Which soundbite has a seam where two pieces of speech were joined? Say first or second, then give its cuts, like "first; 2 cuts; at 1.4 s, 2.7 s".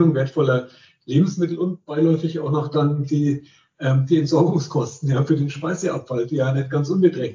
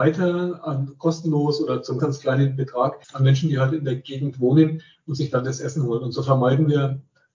second; 2 cuts; at 2.0 s, 3.0 s